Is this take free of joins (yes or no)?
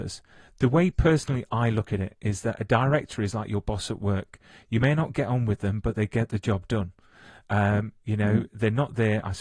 yes